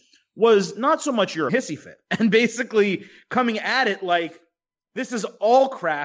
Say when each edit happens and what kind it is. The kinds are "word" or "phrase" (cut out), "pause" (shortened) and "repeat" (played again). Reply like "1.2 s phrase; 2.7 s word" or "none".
1.5 s phrase